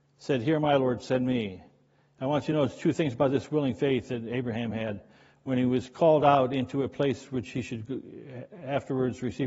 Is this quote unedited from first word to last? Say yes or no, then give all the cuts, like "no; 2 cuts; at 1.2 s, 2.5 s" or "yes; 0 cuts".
yes; 0 cuts